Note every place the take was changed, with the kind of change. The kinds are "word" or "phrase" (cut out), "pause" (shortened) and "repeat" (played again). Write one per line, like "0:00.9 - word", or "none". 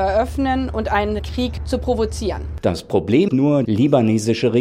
0:01.2 - word
0:03.3 - word
0:03.6 - word